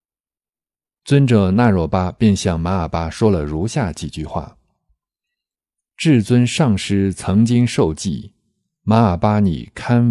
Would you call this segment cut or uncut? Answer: uncut